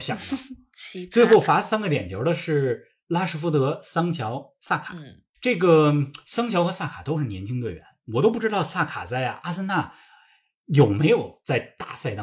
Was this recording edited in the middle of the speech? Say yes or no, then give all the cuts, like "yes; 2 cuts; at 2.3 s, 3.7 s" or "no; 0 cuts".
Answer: no; 0 cuts